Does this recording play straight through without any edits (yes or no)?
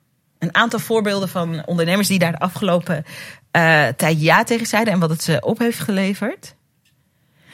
yes